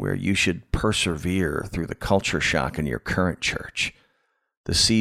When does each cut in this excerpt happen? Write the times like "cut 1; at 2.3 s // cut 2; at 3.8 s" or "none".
none